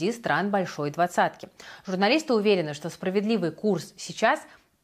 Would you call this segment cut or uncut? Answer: uncut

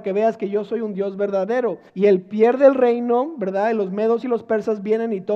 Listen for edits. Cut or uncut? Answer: cut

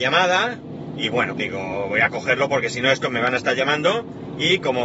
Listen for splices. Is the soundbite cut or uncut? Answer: cut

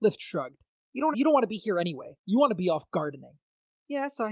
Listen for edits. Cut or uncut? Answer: cut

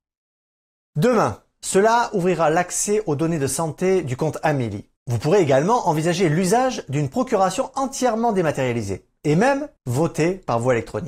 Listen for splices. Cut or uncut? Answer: cut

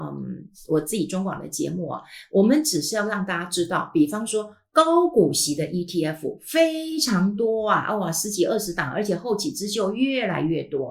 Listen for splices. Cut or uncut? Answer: uncut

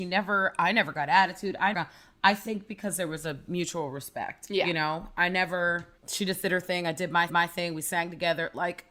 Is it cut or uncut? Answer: cut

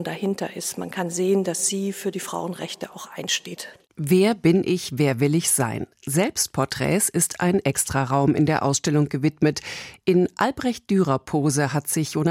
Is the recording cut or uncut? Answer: uncut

